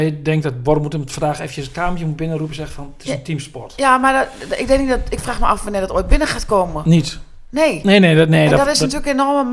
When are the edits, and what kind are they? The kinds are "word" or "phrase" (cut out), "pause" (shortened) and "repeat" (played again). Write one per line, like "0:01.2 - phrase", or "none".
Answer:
none